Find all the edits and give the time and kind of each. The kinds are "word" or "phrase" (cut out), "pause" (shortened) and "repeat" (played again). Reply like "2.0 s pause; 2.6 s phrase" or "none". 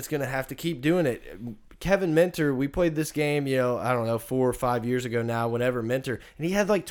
none